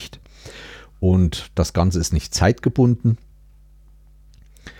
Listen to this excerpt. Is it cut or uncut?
uncut